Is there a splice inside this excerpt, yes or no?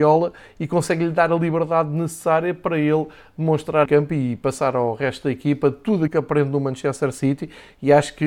yes